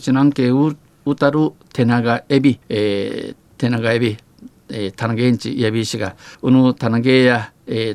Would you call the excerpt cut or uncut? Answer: cut